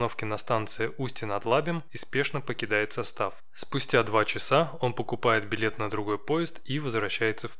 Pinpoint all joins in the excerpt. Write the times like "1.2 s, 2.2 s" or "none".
none